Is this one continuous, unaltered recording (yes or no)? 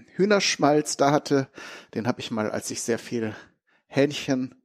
yes